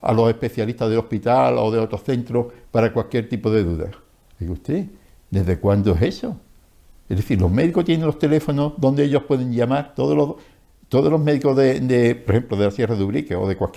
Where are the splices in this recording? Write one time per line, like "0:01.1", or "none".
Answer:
none